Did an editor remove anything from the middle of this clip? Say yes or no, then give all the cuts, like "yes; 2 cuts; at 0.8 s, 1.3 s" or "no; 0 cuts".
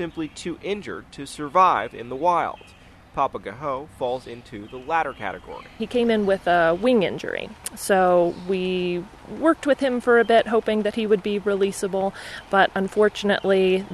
no; 0 cuts